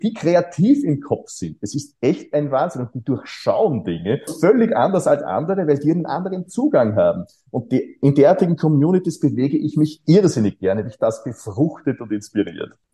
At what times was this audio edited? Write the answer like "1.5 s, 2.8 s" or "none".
4.3 s, 10.9 s